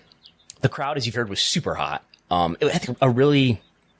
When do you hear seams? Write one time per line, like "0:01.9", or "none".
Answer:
0:01.1
0:02.9